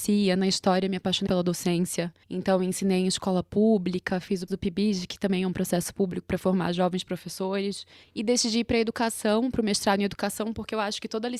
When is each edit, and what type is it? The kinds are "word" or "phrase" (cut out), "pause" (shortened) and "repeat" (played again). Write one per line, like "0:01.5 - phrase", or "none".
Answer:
0:01.3 - word
0:02.2 - pause
0:04.5 - word
0:08.0 - pause